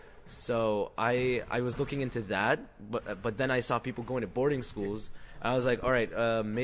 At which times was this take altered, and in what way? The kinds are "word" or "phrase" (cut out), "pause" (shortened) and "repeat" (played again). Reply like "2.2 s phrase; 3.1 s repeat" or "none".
none

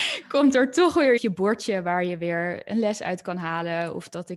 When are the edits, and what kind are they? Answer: 1.2 s phrase

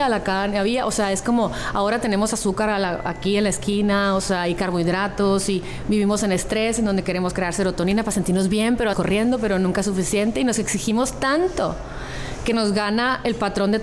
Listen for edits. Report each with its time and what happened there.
8.9 s word

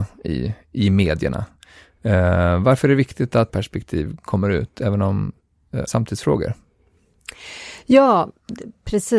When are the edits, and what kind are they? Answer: 3.5 s word; 5.9 s word

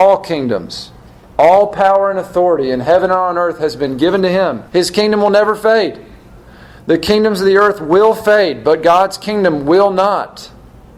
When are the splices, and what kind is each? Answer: 4.7 s pause

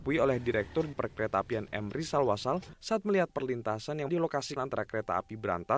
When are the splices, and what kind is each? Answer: 0.9 s word; 3.3 s word; 4.1 s word; 4.6 s word

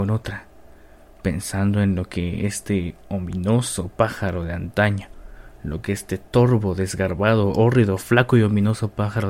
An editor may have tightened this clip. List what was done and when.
none

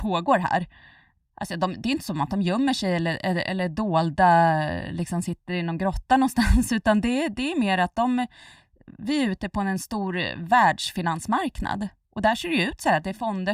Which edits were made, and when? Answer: none

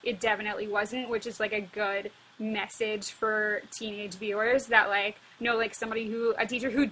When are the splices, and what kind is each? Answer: none

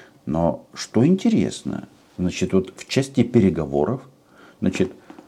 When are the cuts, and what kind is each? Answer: none

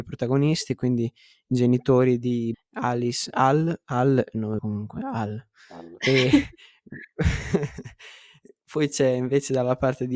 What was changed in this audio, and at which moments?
2.5 s word; 3.3 s word; 4.6 s word

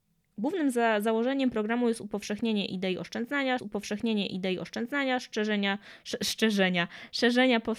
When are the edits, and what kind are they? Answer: 3.6 s repeat

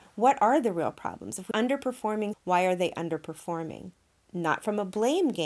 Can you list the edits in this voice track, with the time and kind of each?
1.5 s word; 2.3 s word

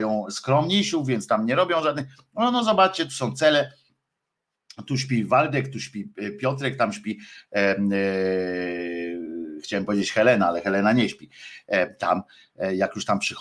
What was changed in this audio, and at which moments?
none

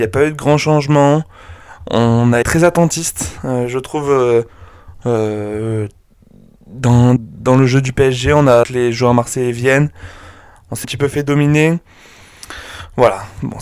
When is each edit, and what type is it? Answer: 2.4 s word; 7.2 s word; 8.6 s word; 10.8 s word

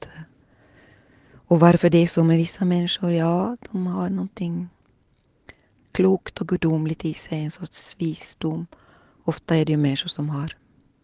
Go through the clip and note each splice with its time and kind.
none

